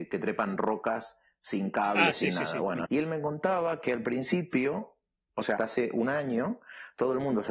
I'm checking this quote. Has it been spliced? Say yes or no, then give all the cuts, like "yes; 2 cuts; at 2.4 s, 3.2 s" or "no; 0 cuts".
yes; 2 cuts; at 2.8 s, 5.6 s